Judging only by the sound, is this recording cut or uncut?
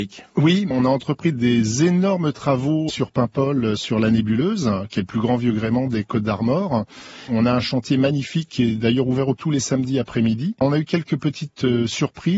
cut